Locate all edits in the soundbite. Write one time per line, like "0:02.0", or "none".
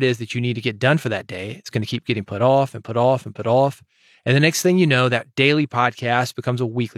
none